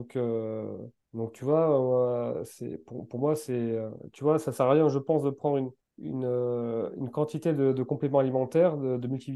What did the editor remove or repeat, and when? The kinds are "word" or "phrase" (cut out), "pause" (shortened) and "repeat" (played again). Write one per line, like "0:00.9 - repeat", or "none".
0:01.0 - pause
0:05.8 - pause